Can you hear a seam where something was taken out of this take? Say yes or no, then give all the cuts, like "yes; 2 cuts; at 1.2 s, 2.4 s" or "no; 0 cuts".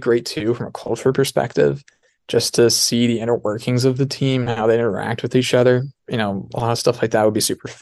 no; 0 cuts